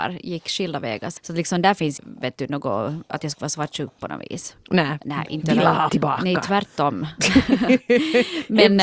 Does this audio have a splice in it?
yes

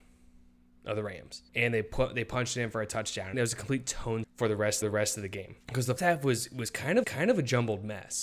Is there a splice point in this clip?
yes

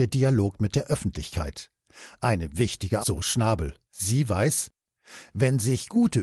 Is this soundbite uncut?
no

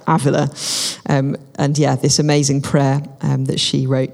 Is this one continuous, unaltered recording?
yes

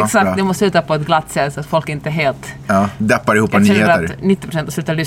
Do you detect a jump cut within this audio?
no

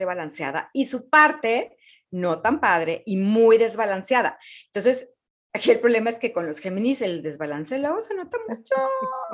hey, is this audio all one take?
yes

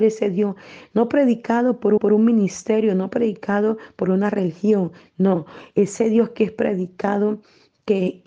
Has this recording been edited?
yes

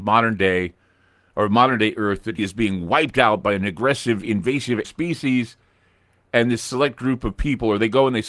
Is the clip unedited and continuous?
no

